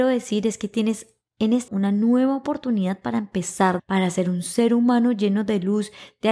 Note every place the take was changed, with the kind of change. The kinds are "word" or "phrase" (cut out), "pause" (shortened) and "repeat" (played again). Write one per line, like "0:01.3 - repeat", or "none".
0:01.7 - word
0:03.8 - phrase